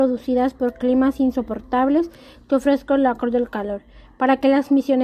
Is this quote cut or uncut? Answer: uncut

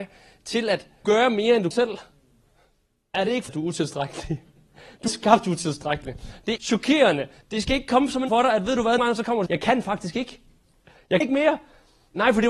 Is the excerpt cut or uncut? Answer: cut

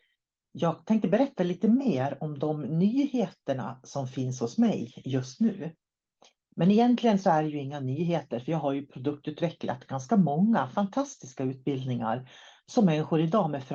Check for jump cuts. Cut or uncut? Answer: uncut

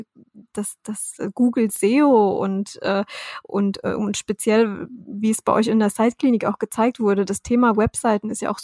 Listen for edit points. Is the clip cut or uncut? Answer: uncut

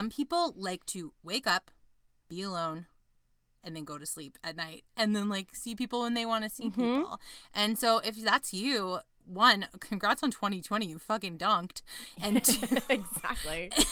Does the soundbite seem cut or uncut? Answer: uncut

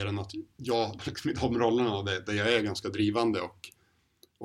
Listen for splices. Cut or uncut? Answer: cut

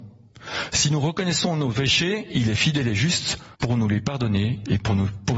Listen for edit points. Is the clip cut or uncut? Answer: cut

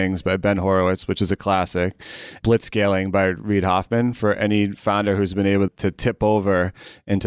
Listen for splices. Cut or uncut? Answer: cut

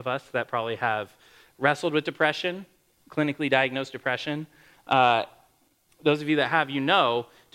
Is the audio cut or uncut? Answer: uncut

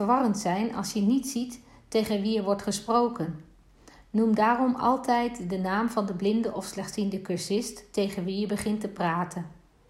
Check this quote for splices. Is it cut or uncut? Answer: uncut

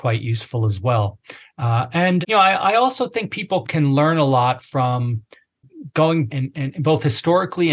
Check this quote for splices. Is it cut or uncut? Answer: cut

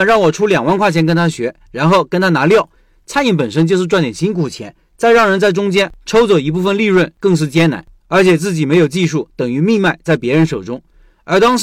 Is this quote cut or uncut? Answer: uncut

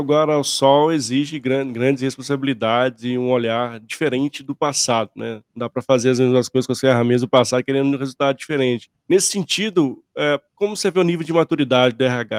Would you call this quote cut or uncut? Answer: cut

